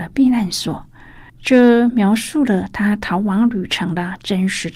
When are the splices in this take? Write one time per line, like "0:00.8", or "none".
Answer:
0:01.3